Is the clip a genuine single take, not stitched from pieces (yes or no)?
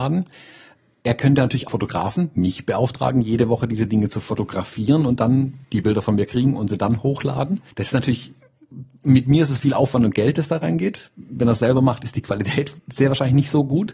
no